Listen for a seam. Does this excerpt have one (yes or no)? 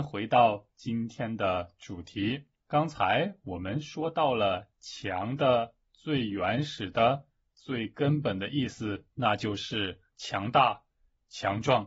yes